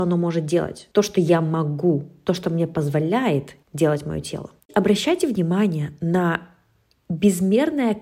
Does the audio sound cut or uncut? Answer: cut